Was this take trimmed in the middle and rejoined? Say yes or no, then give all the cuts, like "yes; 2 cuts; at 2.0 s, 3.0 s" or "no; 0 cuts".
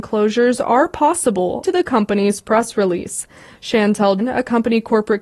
yes; 2 cuts; at 1.6 s, 4.2 s